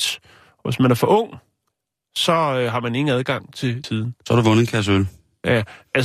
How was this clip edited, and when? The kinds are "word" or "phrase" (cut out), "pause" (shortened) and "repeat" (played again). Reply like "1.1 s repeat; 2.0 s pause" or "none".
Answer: 3.8 s word